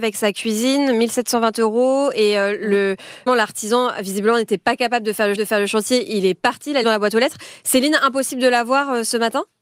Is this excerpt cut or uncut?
cut